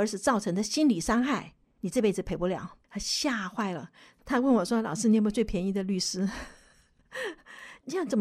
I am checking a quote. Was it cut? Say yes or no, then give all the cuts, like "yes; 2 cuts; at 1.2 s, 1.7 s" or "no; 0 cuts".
yes; 1 cut; at 2.8 s